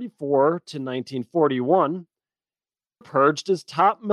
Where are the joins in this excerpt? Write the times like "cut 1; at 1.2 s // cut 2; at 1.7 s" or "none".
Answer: cut 1; at 3.0 s